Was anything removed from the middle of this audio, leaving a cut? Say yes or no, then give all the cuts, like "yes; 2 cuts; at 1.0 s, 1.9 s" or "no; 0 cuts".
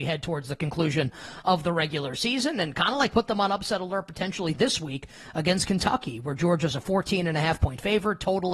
no; 0 cuts